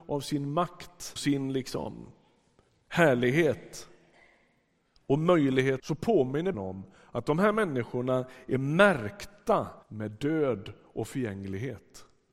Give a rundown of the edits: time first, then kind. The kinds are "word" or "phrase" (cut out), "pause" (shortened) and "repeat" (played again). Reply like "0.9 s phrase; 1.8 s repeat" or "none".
1.2 s word; 5.8 s phrase; 6.5 s word; 9.8 s pause